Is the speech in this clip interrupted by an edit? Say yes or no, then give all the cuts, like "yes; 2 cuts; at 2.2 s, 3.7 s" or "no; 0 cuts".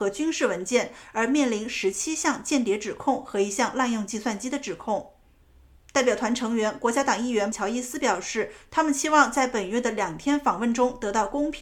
no; 0 cuts